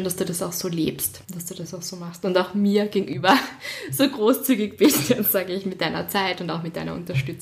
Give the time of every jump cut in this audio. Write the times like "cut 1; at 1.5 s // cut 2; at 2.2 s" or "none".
cut 1; at 1.2 s